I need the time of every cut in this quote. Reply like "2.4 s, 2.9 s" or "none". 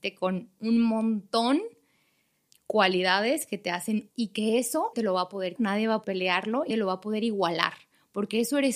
2.5 s, 4.1 s, 4.9 s, 5.6 s, 6.0 s, 6.7 s